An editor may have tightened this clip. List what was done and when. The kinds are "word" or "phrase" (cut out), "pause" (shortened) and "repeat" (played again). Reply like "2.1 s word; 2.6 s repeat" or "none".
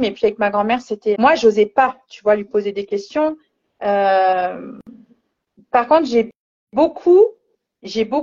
1.1 s word